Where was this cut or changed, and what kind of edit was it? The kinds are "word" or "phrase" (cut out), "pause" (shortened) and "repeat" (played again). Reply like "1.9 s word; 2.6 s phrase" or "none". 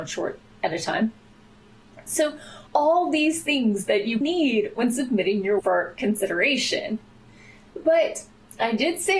2.7 s pause; 4.2 s word; 5.6 s word